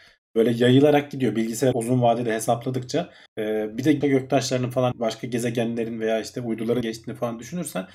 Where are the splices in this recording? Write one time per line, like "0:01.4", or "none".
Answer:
0:01.7
0:03.3
0:04.0
0:04.9
0:06.8